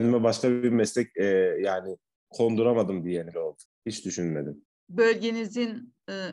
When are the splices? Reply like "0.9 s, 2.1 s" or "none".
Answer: 3.3 s